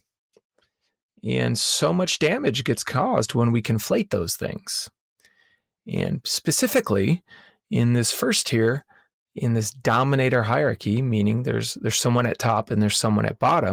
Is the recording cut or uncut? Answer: uncut